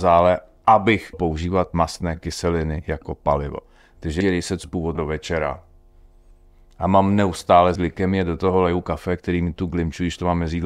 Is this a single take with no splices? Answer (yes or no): no